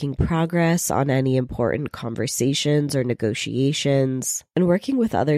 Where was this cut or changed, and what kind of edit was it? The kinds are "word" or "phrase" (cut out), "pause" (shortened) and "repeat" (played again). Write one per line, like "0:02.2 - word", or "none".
none